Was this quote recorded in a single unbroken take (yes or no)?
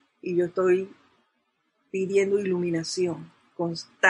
yes